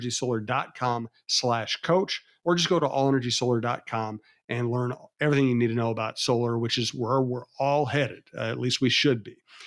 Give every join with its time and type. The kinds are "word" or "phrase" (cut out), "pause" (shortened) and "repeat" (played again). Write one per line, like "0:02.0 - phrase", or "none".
none